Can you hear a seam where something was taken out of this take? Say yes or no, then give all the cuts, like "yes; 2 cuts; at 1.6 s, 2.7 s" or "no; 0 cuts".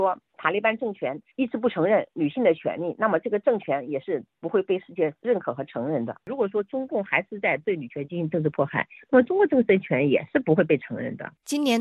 yes; 1 cut; at 1.3 s